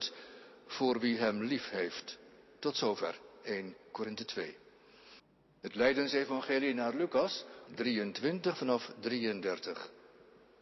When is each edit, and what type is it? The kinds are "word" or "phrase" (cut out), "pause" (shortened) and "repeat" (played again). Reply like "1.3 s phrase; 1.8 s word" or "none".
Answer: 7.7 s word